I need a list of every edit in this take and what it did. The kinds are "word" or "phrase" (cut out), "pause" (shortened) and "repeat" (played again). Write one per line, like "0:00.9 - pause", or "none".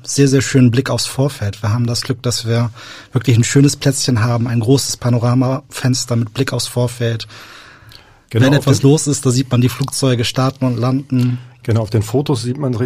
none